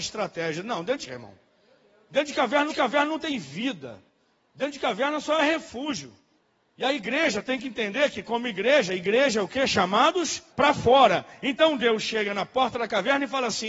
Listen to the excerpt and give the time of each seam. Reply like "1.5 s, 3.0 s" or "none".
1.1 s, 2.7 s, 6.4 s, 10.5 s